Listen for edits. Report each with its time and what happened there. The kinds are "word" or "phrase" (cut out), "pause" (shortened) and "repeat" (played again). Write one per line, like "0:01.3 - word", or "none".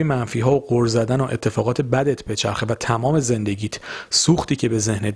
none